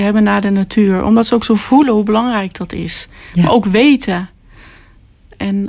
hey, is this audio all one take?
yes; 0 cuts

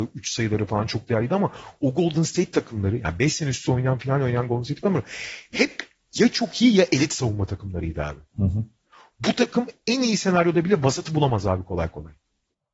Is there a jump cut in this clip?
no; 0 cuts

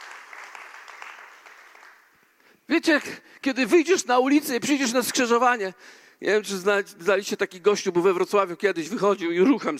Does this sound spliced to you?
no; 0 cuts

